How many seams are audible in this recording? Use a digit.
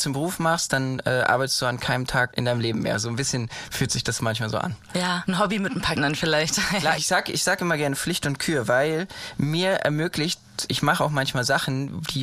4